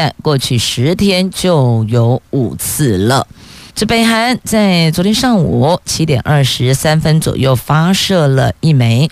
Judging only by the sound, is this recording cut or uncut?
cut